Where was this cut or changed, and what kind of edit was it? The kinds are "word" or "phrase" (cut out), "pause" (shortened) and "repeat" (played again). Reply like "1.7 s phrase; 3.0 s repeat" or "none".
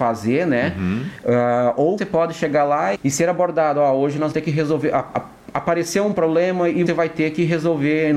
2.0 s word; 2.9 s word; 4.3 s word; 6.9 s word